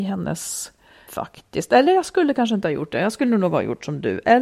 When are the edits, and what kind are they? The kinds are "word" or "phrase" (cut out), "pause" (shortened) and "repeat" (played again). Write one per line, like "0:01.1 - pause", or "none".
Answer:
0:01.1 - word